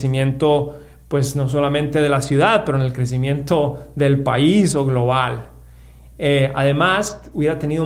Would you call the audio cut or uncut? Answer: uncut